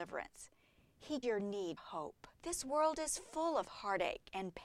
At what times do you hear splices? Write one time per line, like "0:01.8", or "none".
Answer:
0:01.2
0:01.8
0:02.3